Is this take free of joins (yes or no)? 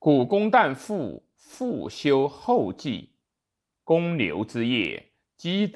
yes